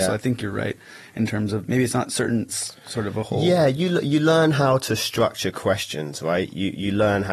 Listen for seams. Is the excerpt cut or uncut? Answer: cut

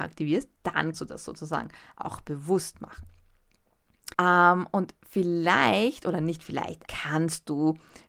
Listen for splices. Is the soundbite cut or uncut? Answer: cut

